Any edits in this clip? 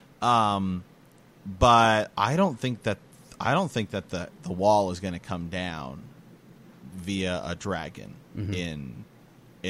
no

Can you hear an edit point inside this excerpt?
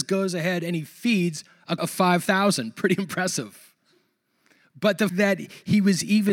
yes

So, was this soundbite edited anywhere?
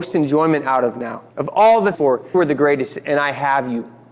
yes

